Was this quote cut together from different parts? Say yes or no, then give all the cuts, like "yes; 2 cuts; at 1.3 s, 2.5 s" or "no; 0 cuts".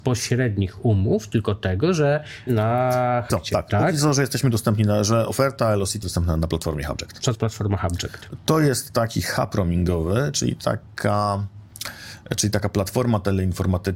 yes; 4 cuts; at 2.5 s, 3.3 s, 6.0 s, 7.3 s